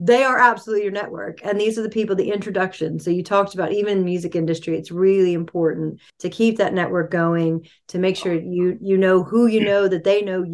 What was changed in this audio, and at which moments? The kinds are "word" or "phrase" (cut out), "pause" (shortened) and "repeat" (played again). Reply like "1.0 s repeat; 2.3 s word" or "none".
6.1 s pause